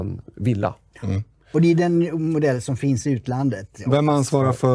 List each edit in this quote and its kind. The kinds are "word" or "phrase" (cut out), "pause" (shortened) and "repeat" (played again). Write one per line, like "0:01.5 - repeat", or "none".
none